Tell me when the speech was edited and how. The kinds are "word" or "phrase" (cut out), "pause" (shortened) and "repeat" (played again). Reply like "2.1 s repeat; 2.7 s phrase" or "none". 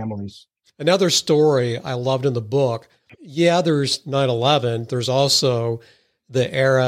none